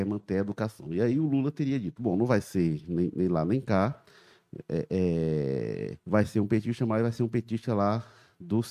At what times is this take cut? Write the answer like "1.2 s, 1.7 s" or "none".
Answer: 6.0 s